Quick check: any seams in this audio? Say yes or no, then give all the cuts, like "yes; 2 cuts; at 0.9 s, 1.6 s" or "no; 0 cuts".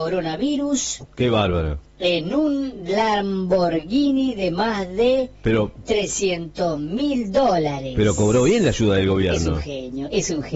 no; 0 cuts